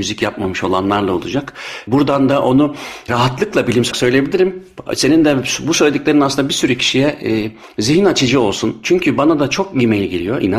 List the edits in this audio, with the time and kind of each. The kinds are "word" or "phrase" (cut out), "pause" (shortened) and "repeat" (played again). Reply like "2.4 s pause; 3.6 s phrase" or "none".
3.9 s word